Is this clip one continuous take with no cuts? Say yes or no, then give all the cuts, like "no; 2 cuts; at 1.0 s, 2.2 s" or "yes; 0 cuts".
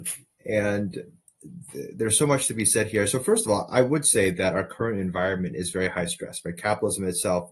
yes; 0 cuts